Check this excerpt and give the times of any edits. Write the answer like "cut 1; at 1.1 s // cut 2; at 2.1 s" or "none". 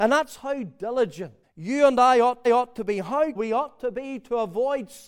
cut 1; at 1.4 s // cut 2; at 2.4 s // cut 3; at 3.3 s